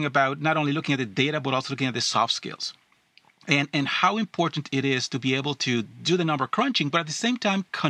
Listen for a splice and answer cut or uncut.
uncut